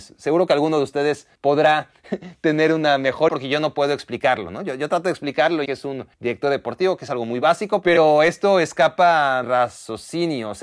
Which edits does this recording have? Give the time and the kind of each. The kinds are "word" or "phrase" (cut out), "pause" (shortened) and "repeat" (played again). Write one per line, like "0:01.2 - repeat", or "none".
0:01.3 - pause
0:03.3 - word
0:05.7 - word
0:06.1 - pause
0:09.4 - word